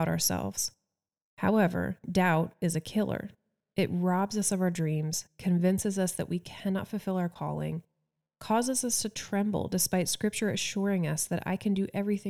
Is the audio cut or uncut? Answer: uncut